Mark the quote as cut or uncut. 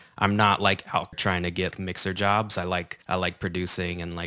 cut